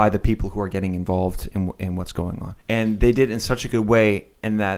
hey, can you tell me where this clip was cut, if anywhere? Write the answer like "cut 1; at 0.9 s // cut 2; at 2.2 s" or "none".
cut 1; at 2.6 s